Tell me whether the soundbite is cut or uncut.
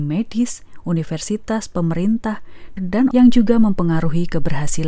cut